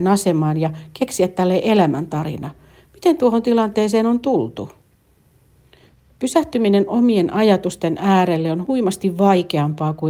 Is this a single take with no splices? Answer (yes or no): yes